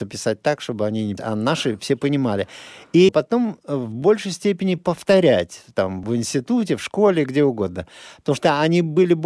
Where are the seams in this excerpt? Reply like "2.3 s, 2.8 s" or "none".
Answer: 1.2 s, 3.1 s, 6.0 s